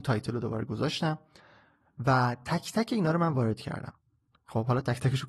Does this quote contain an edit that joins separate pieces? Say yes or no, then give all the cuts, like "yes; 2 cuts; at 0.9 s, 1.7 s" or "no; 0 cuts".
no; 0 cuts